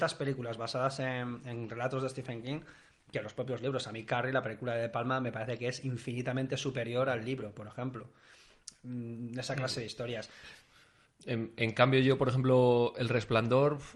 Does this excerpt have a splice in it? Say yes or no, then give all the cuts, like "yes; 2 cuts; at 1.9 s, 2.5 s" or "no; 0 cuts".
no; 0 cuts